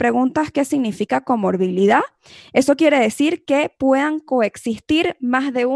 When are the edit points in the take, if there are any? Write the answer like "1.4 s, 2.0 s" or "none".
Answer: none